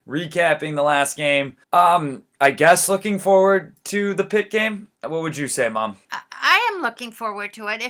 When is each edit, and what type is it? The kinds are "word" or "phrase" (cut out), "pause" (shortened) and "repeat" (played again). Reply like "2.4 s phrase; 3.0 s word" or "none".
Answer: 1.6 s pause; 5.0 s pause; 6.0 s pause